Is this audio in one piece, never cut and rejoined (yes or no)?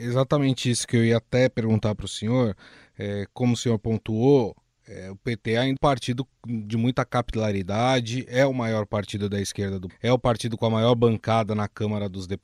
no